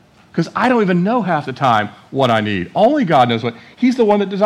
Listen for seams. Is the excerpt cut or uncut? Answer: uncut